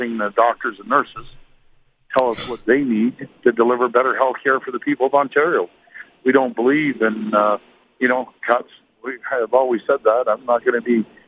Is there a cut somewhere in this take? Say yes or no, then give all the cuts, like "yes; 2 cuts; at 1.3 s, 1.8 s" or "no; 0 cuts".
no; 0 cuts